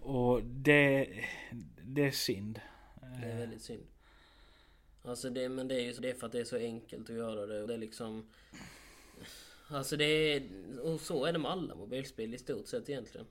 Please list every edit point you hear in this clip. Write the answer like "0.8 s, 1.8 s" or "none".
6.0 s, 7.7 s